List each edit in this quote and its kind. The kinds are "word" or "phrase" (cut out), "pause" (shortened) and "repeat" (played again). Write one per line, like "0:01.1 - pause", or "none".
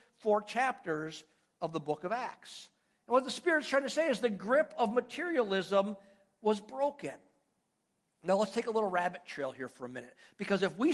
none